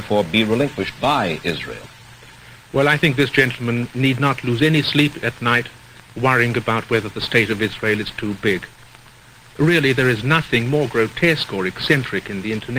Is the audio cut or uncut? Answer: uncut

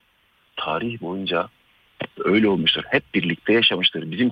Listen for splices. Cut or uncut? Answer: uncut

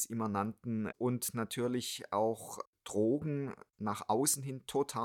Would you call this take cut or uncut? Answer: cut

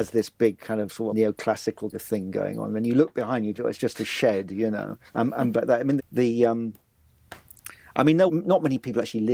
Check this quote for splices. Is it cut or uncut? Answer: cut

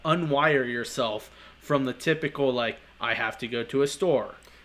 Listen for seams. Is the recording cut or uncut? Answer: uncut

